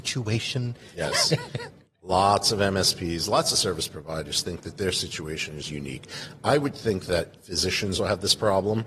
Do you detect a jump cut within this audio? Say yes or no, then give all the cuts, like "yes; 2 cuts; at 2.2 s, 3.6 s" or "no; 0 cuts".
yes; 1 cut; at 8.0 s